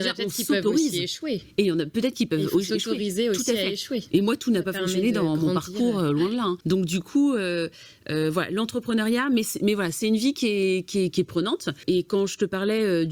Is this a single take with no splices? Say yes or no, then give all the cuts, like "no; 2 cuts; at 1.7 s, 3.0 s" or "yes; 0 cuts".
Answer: yes; 0 cuts